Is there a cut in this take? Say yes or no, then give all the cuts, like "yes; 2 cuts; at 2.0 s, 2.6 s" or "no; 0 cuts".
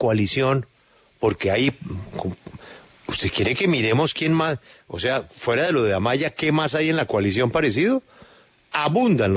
no; 0 cuts